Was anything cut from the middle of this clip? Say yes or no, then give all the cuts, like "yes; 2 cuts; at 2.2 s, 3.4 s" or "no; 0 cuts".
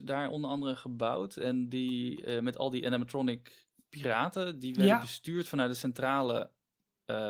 no; 0 cuts